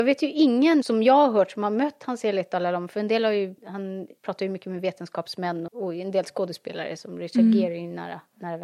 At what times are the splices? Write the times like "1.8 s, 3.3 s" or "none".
3.6 s, 5.7 s